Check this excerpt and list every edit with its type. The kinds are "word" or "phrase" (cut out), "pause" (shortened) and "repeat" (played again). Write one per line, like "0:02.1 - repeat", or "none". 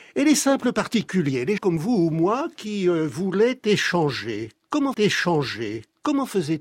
0:01.6 - word
0:04.9 - repeat